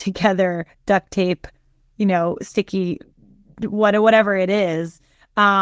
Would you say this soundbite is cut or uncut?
uncut